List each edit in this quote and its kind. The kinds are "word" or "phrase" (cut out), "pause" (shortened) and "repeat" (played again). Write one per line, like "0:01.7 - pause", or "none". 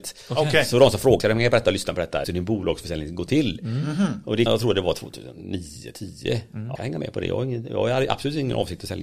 0:01.2 - word
0:02.2 - word
0:04.5 - word
0:06.7 - word